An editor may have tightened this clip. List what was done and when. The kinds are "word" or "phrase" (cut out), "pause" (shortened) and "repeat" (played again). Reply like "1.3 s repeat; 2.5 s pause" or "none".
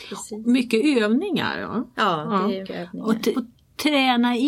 2.6 s word; 3.3 s word